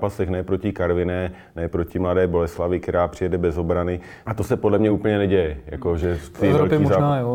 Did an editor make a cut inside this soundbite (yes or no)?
no